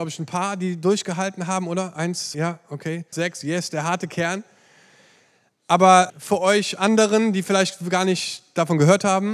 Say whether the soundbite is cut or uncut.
cut